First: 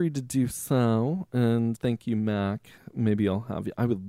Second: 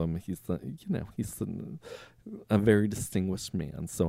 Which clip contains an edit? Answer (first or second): first